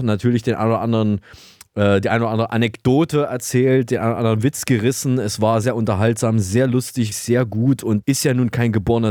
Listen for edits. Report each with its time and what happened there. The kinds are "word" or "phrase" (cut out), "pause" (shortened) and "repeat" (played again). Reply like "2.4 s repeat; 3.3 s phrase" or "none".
5.6 s word; 7.1 s word; 8.0 s word